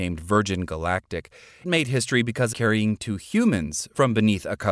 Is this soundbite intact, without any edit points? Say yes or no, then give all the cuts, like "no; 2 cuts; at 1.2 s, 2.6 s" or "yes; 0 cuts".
no; 2 cuts; at 1.6 s, 2.5 s